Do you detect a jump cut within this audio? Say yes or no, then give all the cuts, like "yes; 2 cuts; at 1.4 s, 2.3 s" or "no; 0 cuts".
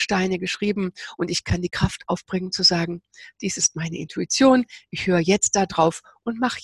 yes; 1 cut; at 3.6 s